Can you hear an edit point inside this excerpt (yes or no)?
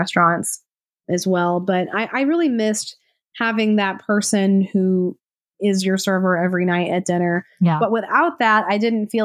no